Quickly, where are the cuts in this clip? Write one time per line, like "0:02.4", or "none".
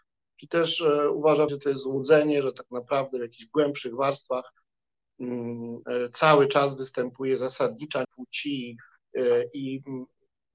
0:01.5
0:08.0

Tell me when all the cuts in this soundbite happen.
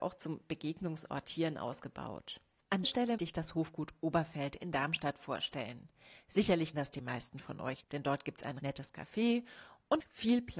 0:01.2
0:02.8
0:03.2
0:06.7
0:07.8
0:08.6

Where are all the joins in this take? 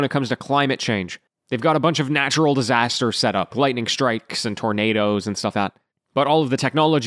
0:03.5
0:05.5

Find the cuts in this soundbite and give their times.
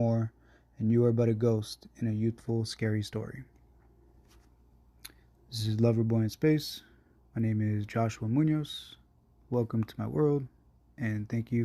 none

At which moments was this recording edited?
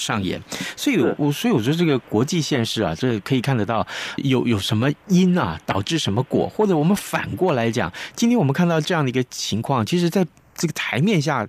0:04.2

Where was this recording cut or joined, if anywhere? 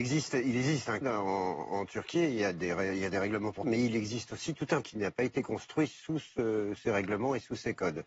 0:01.0
0:03.6
0:04.8
0:06.8

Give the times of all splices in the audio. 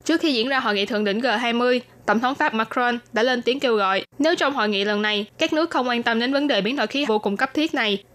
0:02.5
0:04.1
0:07.1

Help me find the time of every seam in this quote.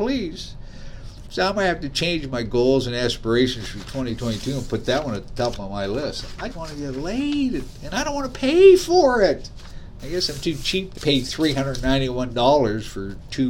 0:06.5
0:11.0

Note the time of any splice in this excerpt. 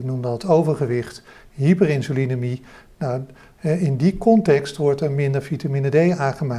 none

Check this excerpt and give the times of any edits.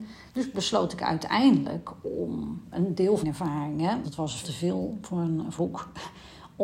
0:02.7
0:03.2
0:04.0
0:04.4
0:05.6

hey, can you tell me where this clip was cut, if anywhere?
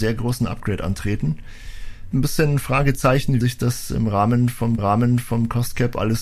0:02.1
0:03.4
0:04.8

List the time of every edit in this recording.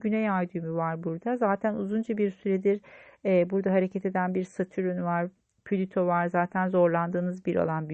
none

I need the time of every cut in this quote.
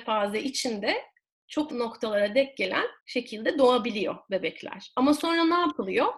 0:01.7
0:03.0

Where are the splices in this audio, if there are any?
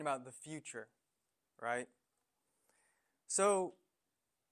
none

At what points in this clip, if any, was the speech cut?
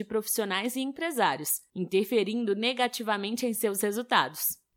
none

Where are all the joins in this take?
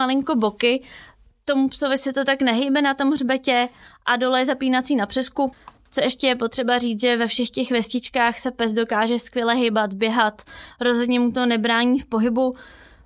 none

